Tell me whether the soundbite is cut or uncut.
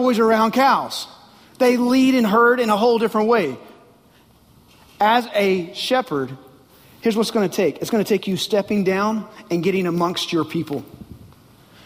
uncut